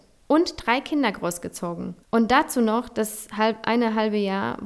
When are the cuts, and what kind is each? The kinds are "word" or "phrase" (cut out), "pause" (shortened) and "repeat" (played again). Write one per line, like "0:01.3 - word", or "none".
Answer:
0:02.0 - pause